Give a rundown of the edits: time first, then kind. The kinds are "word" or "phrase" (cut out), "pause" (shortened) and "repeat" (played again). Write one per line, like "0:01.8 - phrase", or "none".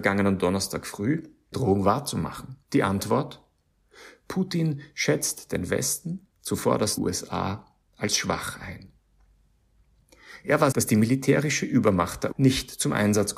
0:01.5 - word
0:02.6 - pause
0:06.3 - pause
0:07.0 - word
0:10.7 - word
0:12.3 - word